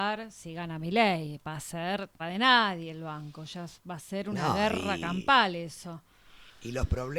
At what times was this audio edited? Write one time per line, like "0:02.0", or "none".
0:02.2